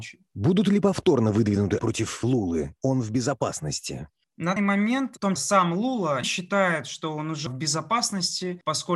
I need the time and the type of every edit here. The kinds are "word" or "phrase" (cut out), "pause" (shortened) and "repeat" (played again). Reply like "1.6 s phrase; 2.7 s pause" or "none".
1.8 s word; 2.8 s word; 4.6 s word; 5.4 s word; 6.2 s word; 7.5 s word